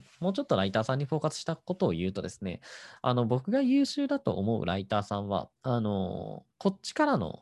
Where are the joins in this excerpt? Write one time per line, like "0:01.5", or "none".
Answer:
0:05.6
0:06.5